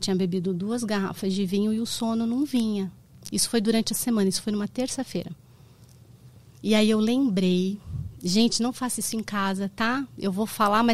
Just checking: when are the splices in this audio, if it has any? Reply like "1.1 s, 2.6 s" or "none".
none